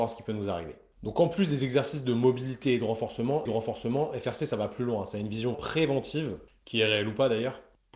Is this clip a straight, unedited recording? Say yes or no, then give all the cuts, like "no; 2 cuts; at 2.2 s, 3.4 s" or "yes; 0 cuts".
no; 2 cuts; at 3.5 s, 5.5 s